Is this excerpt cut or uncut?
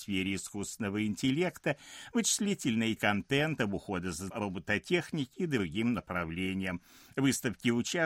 cut